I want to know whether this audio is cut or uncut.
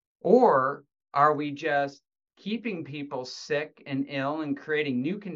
uncut